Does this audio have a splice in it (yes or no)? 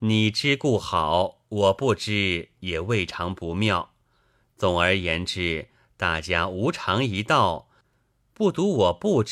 no